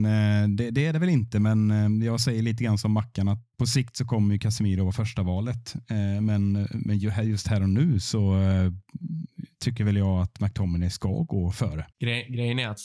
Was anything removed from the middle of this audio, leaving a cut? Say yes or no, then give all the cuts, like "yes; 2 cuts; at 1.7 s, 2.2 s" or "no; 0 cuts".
yes; 1 cut; at 11.9 s